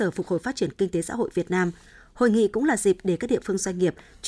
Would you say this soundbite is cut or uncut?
uncut